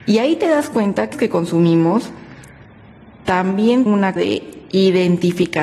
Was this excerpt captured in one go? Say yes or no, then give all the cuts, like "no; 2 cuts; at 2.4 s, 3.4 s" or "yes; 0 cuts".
no; 3 cuts; at 1.1 s, 3.9 s, 4.2 s